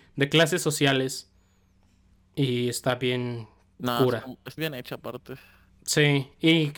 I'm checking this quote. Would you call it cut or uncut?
cut